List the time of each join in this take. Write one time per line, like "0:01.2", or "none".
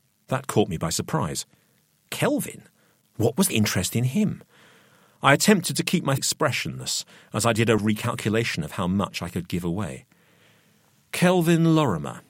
0:03.5
0:06.2
0:07.8